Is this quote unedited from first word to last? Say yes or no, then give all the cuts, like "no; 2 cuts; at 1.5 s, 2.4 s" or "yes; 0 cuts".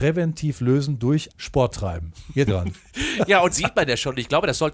no; 3 cuts; at 1.3 s, 2.5 s, 3.5 s